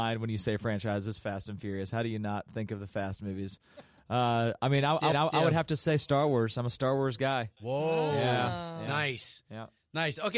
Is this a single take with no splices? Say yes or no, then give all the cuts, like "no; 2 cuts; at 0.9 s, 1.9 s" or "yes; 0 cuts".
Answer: no; 1 cut; at 5.1 s